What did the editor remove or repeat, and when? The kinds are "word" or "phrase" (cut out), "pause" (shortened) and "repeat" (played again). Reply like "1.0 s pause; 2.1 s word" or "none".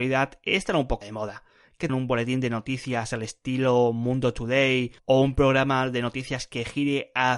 1.0 s word; 1.9 s phrase; 5.0 s pause